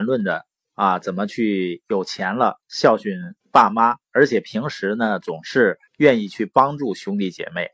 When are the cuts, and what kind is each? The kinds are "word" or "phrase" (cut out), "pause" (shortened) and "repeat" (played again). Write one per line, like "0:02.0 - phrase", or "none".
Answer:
0:03.4 - pause
0:05.9 - pause